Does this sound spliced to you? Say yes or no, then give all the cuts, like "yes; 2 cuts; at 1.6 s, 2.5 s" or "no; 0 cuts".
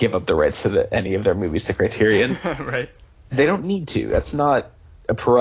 no; 0 cuts